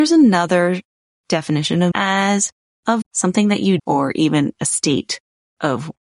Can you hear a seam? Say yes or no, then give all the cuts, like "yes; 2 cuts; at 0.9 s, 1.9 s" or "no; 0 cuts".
yes; 3 cuts; at 1.9 s, 3.0 s, 3.8 s